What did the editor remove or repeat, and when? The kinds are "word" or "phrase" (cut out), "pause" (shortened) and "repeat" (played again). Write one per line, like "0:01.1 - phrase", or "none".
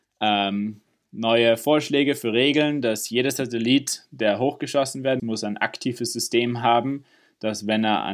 0:05.2 - word